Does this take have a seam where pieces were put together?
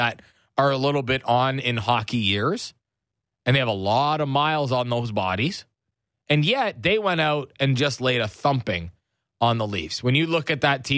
no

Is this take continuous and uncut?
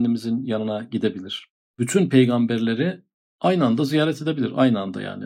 yes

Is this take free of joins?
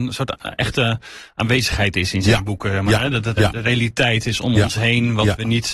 no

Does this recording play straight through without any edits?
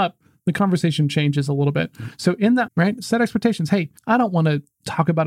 no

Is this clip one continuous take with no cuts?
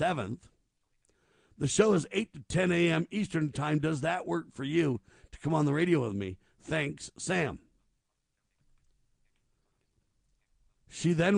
yes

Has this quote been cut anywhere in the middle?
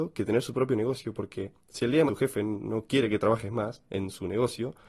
yes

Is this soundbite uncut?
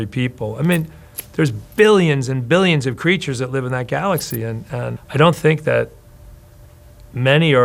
no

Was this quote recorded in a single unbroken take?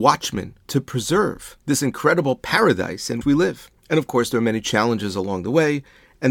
no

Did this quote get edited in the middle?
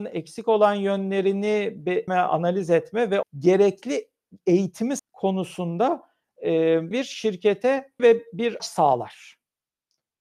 yes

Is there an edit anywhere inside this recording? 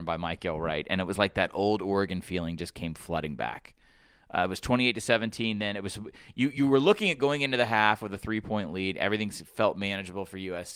no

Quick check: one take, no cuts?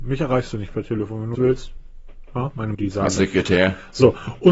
no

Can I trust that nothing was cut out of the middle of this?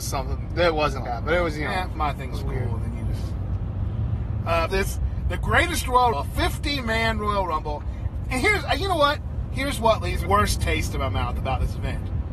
no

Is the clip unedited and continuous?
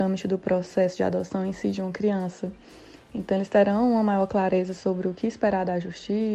yes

